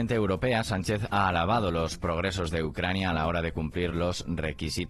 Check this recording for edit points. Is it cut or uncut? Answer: uncut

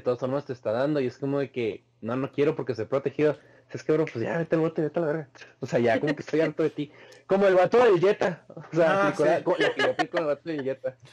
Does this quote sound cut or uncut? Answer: uncut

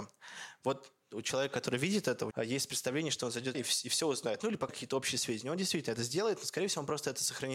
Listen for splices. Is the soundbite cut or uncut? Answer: cut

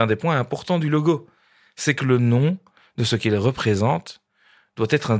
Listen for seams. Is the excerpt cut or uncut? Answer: uncut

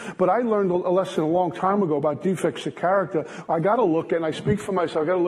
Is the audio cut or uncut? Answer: uncut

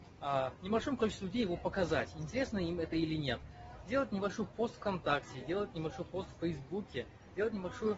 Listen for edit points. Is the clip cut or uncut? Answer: uncut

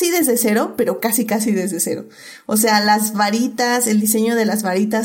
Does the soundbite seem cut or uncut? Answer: uncut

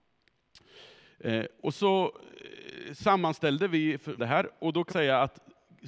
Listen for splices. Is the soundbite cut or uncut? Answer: cut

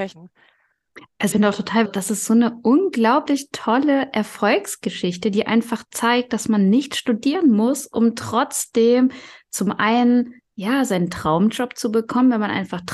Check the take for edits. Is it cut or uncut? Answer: cut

